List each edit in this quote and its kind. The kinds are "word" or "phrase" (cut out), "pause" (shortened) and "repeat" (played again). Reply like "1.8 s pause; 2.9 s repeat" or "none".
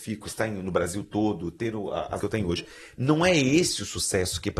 2.2 s word